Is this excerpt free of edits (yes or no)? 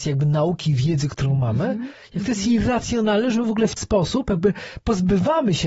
no